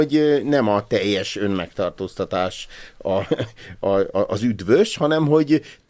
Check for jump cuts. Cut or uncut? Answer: uncut